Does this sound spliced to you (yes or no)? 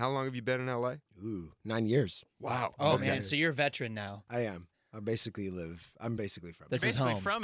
no